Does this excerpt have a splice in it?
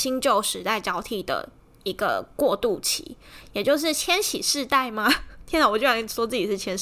no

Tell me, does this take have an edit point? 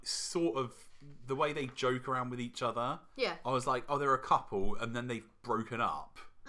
no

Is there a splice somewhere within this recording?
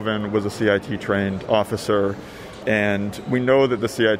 no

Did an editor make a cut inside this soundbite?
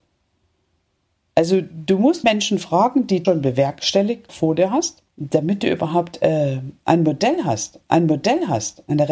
yes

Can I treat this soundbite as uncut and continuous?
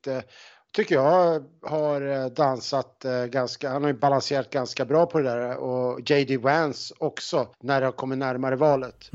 no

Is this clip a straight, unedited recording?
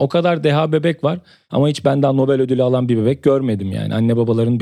yes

